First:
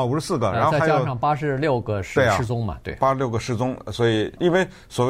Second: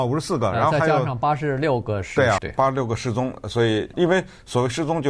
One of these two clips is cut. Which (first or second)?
second